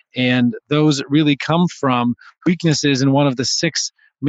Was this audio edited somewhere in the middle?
no; 0 cuts

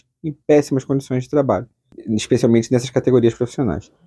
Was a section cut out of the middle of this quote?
no; 0 cuts

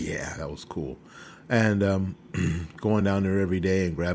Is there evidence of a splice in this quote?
no; 0 cuts

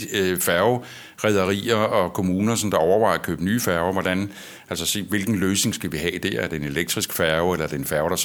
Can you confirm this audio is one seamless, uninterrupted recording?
yes; 0 cuts

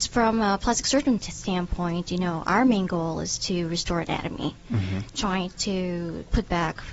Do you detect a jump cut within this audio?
no; 0 cuts

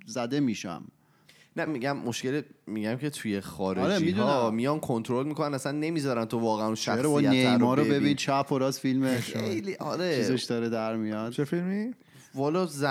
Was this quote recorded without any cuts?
no; 1 cut; at 1.7 s

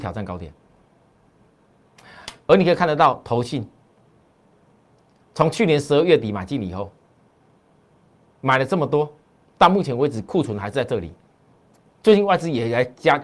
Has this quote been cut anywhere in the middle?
no; 0 cuts

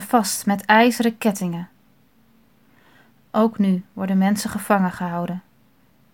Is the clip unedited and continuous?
yes; 0 cuts

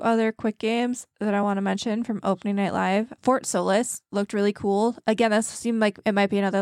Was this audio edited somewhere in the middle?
no; 0 cuts

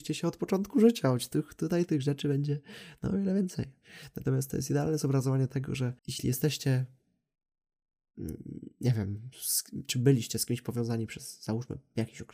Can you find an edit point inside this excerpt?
yes; 1 cut; at 6.0 s

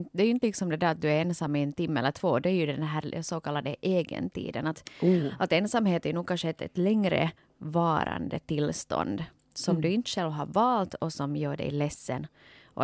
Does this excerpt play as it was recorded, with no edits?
yes; 0 cuts

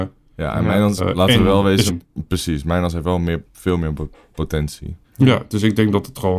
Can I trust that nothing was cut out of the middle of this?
no; 3 cuts; at 1.0 s, 1.9 s, 5.0 s

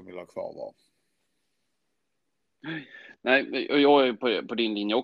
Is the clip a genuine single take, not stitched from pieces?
yes; 0 cuts

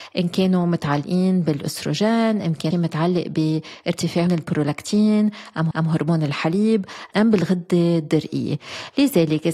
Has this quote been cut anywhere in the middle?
yes; 3 cuts; at 2.7 s, 4.3 s, 5.7 s

